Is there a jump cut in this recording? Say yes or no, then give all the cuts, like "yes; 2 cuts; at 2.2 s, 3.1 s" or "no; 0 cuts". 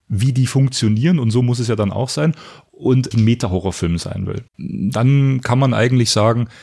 yes; 2 cuts; at 3.1 s, 4.5 s